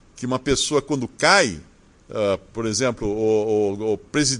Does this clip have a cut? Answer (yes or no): no